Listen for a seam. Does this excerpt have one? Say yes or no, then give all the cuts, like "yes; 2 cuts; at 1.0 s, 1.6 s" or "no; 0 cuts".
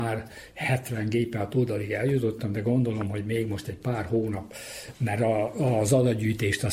no; 0 cuts